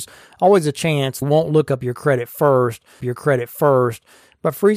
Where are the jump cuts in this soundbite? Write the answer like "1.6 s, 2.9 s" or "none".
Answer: 1.2 s, 3.0 s